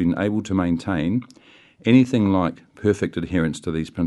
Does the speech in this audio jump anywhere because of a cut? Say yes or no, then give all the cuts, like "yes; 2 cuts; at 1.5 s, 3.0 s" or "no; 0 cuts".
no; 0 cuts